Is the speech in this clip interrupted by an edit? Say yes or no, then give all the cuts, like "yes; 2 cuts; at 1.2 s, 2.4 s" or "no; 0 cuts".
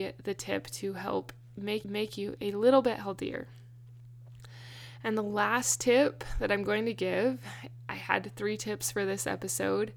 yes; 1 cut; at 1.8 s